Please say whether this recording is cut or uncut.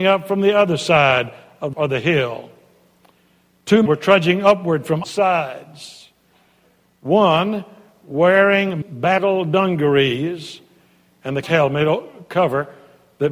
cut